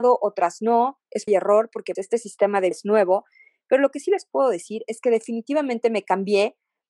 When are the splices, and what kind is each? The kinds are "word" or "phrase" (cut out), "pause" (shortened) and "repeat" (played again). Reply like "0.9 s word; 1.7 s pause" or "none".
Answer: 1.3 s word; 2.0 s word; 2.7 s word